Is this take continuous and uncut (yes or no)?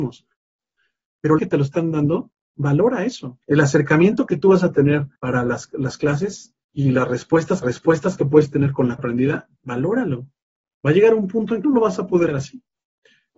no